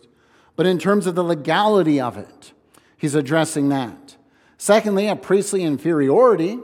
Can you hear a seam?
no; 0 cuts

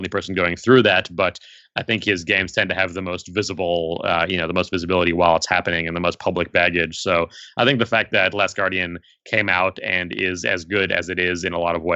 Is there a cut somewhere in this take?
no; 0 cuts

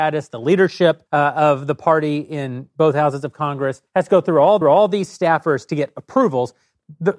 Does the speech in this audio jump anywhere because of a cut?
yes; 3 cuts; at 1.1 s, 3.9 s, 4.6 s

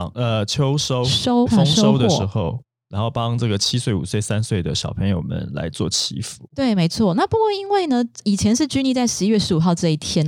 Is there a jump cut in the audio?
yes; 2 cuts; at 1.5 s, 8.2 s

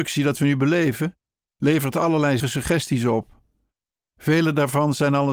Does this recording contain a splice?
yes; 1 cut; at 2.4 s

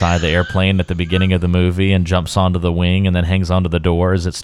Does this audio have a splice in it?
no; 0 cuts

